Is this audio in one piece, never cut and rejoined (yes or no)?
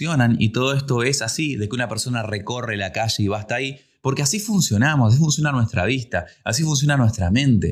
yes